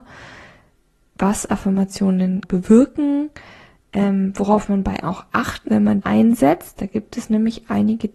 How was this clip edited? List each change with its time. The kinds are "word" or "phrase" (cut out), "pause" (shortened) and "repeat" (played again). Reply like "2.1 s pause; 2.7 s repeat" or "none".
2.4 s word; 5.0 s word; 5.7 s word; 6.0 s word